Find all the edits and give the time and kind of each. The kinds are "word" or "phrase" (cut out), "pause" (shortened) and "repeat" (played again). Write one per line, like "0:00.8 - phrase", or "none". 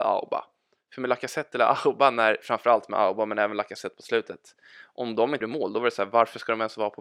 0:05.4 - word